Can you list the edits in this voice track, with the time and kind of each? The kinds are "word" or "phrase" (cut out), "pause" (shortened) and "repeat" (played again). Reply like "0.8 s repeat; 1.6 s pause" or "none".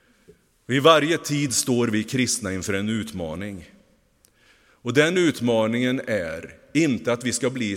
none